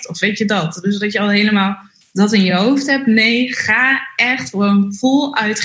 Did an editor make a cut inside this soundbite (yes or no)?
no